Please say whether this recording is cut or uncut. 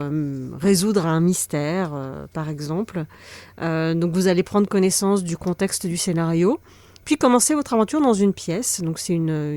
uncut